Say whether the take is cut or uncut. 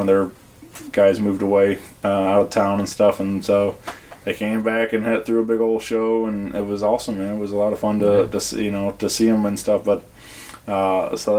uncut